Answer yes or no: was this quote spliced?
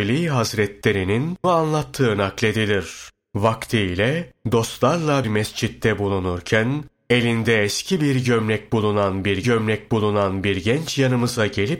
yes